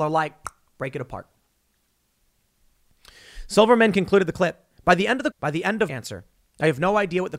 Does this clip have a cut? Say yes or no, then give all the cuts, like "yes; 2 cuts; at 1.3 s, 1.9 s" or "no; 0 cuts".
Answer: yes; 3 cuts; at 4.7 s, 5.3 s, 5.9 s